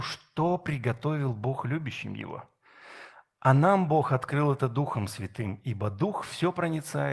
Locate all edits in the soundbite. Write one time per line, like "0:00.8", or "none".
none

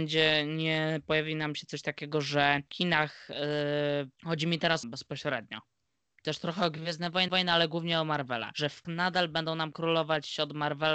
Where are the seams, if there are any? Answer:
0:04.1
0:04.8
0:07.3
0:08.8

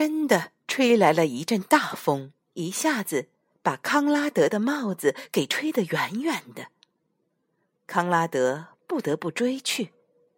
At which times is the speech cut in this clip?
0:02.4

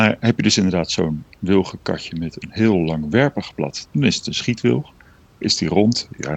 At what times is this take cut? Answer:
0:03.9

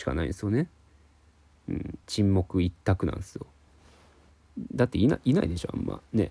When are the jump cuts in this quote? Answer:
0:02.0

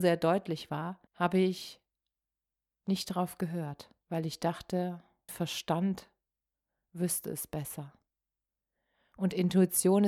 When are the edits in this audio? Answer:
0:01.1
0:04.0
0:05.3

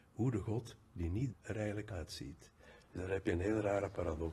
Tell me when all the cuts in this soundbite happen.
0:01.3
0:01.9

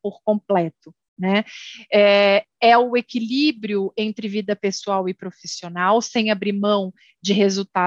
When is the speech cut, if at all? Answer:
none

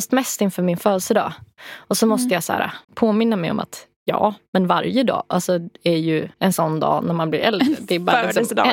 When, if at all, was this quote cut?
0:02.8
0:06.3

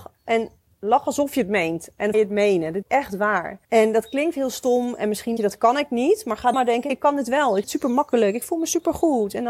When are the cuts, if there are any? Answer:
0:02.1
0:02.8
0:03.6
0:05.4
0:06.5
0:06.9
0:07.6

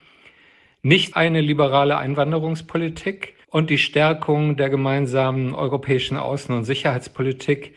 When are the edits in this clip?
0:01.1
0:03.4

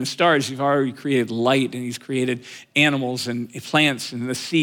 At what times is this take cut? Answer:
none

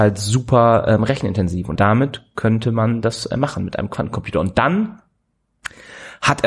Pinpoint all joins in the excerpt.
0:01.7

